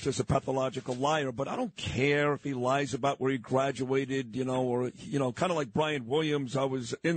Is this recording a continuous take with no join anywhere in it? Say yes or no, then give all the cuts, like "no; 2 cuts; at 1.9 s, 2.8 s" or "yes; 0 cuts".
yes; 0 cuts